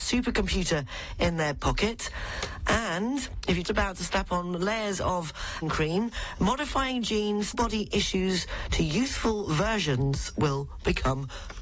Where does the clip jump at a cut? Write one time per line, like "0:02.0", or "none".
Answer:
0:03.6
0:05.6
0:07.5